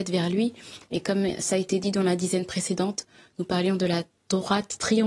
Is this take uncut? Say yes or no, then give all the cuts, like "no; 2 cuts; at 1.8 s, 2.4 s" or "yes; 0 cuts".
yes; 0 cuts